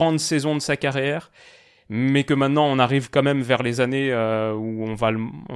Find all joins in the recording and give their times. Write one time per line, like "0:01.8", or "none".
none